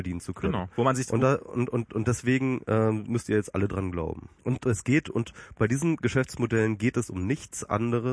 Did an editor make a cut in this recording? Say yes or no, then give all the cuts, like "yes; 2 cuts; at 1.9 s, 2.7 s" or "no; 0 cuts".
yes; 2 cuts; at 1.9 s, 4.4 s